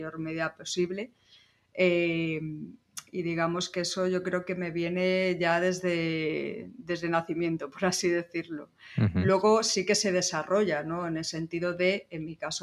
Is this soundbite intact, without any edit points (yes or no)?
yes